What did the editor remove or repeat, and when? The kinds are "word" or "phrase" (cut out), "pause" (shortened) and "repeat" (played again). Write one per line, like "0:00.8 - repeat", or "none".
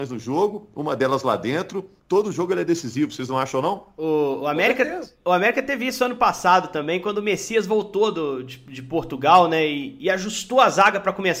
none